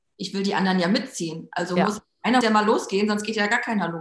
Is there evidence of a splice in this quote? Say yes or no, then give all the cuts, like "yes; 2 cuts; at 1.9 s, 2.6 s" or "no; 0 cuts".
yes; 1 cut; at 2.4 s